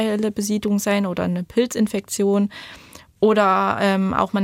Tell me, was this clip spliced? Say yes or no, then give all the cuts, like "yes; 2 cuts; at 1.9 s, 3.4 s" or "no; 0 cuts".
no; 0 cuts